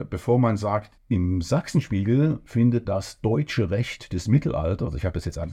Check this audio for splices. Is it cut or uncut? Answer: cut